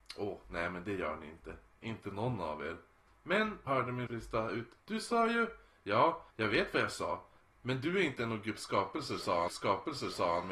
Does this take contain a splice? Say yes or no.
yes